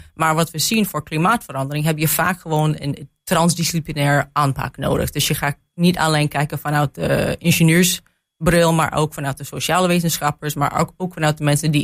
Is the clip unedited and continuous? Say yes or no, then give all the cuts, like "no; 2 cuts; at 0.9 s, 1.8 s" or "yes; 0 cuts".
yes; 0 cuts